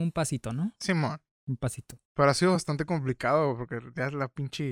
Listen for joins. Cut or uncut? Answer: uncut